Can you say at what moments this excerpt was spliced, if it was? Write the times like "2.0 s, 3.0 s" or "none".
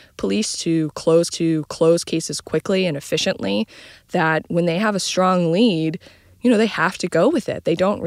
1.3 s